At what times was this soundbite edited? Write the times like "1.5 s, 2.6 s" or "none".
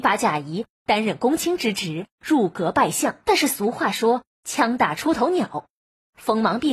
3.2 s